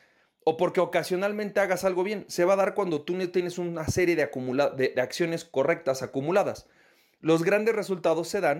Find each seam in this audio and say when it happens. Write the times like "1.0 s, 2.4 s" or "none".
none